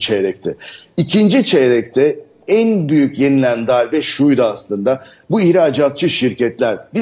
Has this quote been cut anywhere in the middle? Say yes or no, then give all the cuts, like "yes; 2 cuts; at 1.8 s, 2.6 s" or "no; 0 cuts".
no; 0 cuts